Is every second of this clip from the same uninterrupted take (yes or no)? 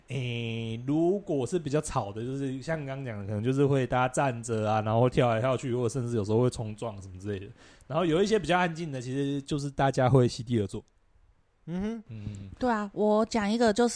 yes